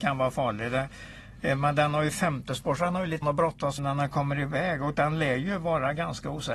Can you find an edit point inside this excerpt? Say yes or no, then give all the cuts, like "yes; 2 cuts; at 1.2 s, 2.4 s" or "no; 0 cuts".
yes; 2 cuts; at 3.2 s, 3.8 s